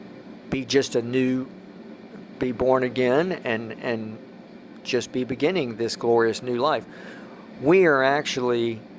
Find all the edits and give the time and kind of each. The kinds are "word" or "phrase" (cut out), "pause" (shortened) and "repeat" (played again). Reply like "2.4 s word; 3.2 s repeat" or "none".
none